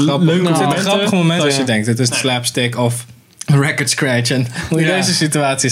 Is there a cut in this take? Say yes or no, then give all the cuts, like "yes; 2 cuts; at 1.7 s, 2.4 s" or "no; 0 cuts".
yes; 4 cuts; at 1.4 s, 2.1 s, 3.2 s, 4.5 s